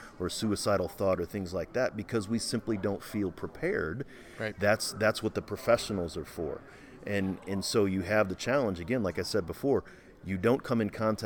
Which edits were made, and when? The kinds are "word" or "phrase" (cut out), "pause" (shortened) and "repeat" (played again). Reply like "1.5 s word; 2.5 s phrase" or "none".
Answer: none